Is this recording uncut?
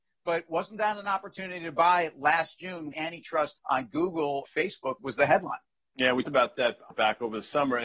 no; 6 cuts; at 2.9 s, 3.6 s, 4.4 s, 5.0 s, 6.3 s, 6.9 s

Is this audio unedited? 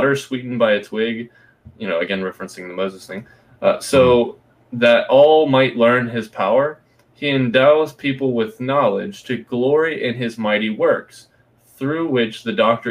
yes; 0 cuts

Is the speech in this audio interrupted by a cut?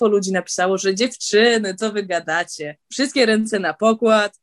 yes; 1 cut; at 2.8 s

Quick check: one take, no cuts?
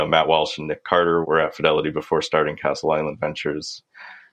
no; 1 cut; at 1.2 s

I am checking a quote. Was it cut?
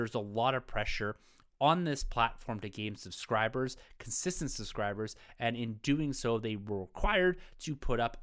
no; 0 cuts

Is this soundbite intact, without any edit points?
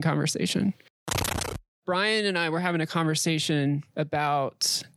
no; 1 cut; at 3.9 s

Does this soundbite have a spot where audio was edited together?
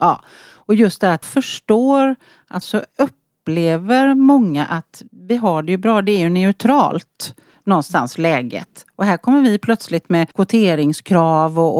yes; 4 cuts; at 1.2 s, 2.6 s, 5.1 s, 10.3 s

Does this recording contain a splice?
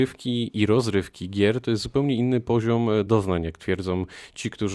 no; 0 cuts

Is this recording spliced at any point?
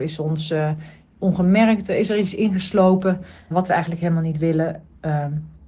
yes; 1 cut; at 3.5 s

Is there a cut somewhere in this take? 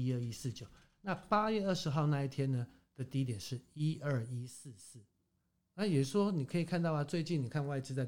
no; 0 cuts

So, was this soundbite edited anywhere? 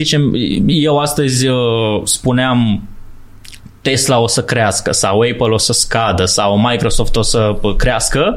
no; 0 cuts

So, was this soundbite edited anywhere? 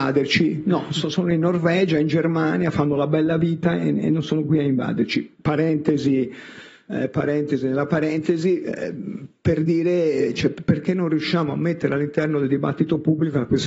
yes; 1 cut; at 5.4 s

